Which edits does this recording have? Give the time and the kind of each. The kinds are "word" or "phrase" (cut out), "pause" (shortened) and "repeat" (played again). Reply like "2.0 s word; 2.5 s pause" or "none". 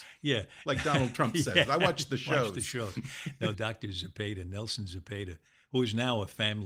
3.5 s phrase